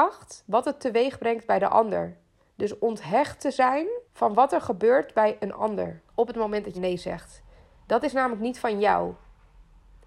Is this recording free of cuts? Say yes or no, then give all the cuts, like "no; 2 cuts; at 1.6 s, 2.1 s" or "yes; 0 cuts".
no; 3 cuts; at 4.0 s, 6.1 s, 6.7 s